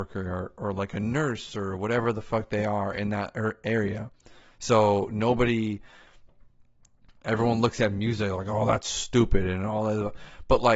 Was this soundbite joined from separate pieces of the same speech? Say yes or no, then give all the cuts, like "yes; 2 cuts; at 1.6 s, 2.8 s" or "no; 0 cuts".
no; 0 cuts